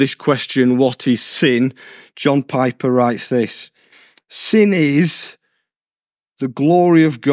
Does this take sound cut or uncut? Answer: uncut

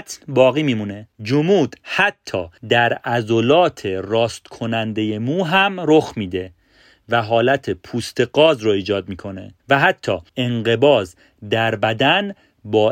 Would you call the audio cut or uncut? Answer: cut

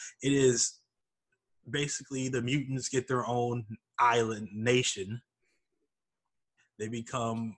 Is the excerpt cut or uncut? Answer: uncut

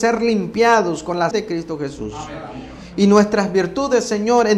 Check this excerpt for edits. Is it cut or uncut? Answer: cut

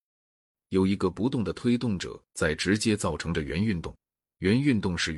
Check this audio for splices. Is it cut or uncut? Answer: uncut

